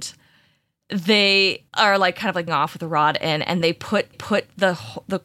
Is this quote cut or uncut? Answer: cut